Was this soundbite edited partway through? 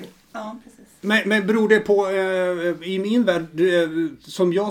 no; 0 cuts

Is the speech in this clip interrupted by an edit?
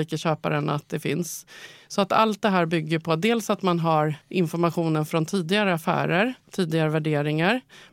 yes; 2 cuts; at 4.2 s, 6.4 s

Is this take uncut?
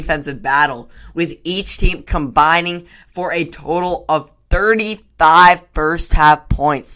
yes; 0 cuts

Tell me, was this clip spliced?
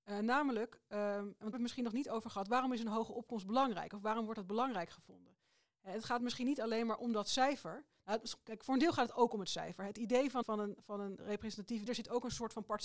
yes; 3 cuts; at 1.5 s, 10.4 s, 11.9 s

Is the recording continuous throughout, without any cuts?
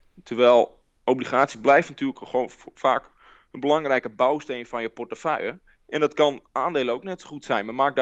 yes; 0 cuts

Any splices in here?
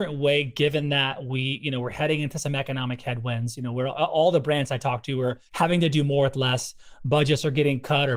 yes; 1 cut; at 5.5 s

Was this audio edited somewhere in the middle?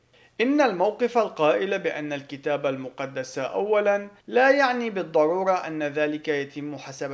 yes; 1 cut; at 4.2 s

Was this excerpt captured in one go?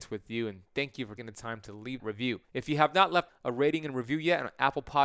no; 4 cuts; at 1.2 s, 2.0 s, 2.4 s, 3.3 s

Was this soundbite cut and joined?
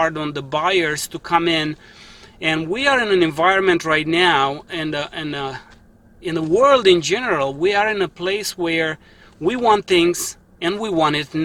no; 0 cuts

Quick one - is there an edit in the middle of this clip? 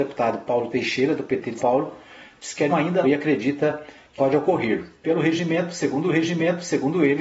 yes; 5 cuts; at 1.6 s, 2.7 s, 3.0 s, 4.2 s, 6.1 s

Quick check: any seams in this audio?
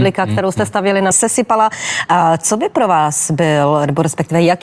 yes; 1 cut; at 1.1 s

